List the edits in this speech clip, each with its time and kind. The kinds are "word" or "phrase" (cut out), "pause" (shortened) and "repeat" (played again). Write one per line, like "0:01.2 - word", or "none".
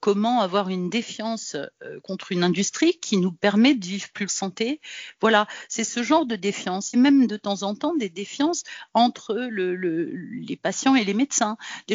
0:04.3 - phrase
0:06.9 - phrase